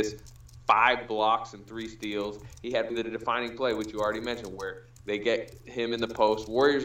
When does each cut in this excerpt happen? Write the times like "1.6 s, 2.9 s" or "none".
2.9 s